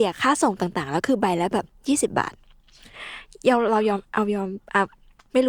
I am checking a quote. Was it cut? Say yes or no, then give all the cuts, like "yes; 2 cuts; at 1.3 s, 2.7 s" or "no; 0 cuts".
yes; 1 cut; at 1.7 s